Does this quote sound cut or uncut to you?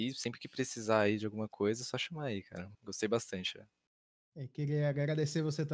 cut